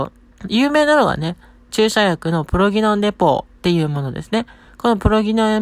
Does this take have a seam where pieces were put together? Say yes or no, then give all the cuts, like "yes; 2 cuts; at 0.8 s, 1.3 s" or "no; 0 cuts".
no; 0 cuts